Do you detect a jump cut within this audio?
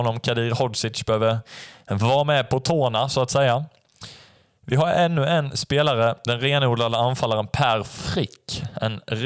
no; 0 cuts

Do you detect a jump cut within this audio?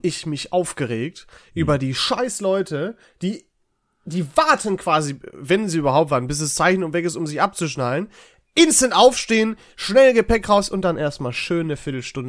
no; 0 cuts

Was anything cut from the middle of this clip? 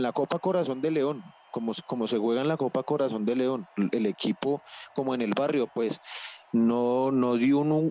no; 0 cuts

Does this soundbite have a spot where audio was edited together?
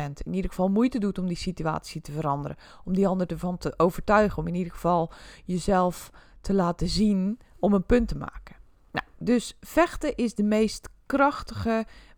no; 0 cuts

